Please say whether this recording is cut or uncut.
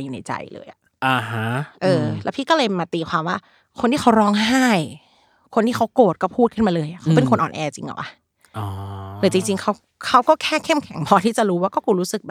uncut